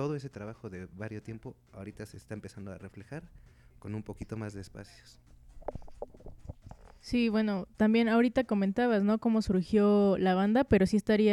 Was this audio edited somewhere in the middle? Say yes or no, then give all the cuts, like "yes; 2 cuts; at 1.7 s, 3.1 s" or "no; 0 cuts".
no; 0 cuts